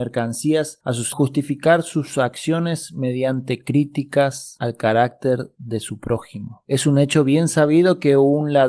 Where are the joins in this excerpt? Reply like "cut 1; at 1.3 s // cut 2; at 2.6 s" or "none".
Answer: cut 1; at 1.1 s